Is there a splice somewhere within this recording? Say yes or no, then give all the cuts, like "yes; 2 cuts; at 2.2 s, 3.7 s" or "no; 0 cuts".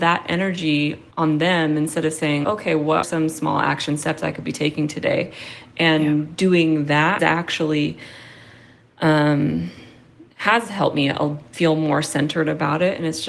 yes; 5 cuts; at 1.1 s, 2.4 s, 3.0 s, 7.2 s, 10.3 s